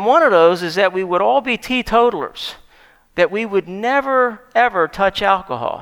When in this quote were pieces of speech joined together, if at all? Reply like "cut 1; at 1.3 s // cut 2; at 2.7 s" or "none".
none